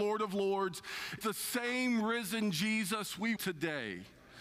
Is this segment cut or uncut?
cut